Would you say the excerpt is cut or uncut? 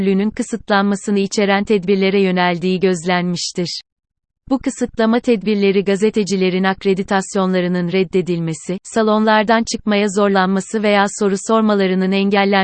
uncut